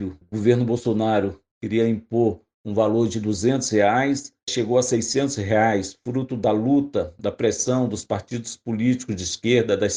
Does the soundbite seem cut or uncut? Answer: uncut